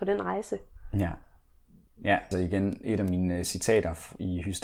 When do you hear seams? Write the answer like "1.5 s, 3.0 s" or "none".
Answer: 2.3 s, 2.8 s